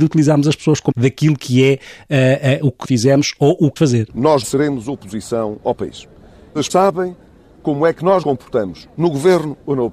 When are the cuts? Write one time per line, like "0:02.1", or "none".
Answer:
0:00.9
0:02.8
0:03.8
0:04.4
0:06.7
0:08.2